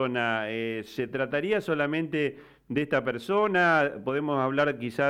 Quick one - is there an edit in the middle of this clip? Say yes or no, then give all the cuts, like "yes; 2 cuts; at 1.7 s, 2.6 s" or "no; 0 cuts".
no; 0 cuts